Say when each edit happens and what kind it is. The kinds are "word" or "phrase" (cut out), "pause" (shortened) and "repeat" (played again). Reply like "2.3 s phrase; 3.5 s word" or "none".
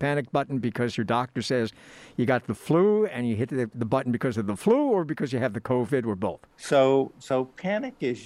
6.5 s pause